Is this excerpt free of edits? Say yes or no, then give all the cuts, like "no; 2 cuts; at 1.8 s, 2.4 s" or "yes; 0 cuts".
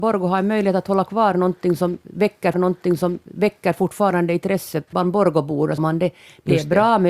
no; 3 cuts; at 2.5 s, 4.9 s, 5.8 s